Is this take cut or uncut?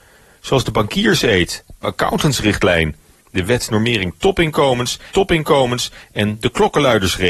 cut